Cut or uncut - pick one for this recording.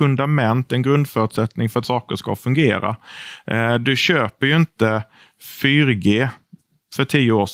cut